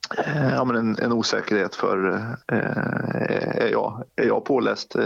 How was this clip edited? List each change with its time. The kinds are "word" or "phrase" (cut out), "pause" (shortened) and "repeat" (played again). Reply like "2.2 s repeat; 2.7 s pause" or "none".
1.0 s word; 2.4 s pause